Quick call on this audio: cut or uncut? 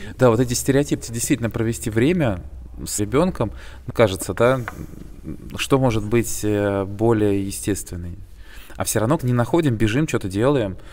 cut